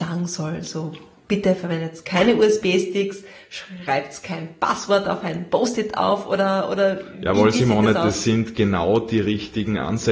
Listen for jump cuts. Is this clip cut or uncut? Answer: uncut